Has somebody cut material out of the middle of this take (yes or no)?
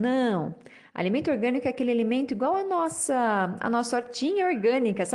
no